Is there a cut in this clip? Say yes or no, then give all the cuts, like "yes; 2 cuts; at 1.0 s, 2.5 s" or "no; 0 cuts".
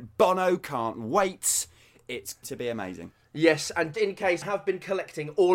yes; 3 cuts; at 2.4 s, 3.9 s, 4.4 s